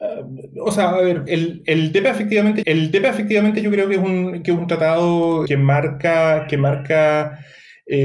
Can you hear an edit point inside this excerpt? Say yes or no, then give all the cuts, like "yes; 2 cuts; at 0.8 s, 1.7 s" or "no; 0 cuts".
yes; 3 cuts; at 1.3 s, 2.6 s, 5.5 s